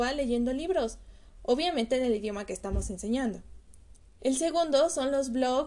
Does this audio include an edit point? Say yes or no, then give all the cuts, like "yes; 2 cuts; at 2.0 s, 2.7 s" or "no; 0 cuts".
yes; 1 cut; at 4.0 s